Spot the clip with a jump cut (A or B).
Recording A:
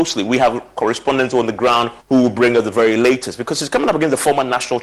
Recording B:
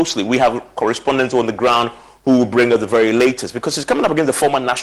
A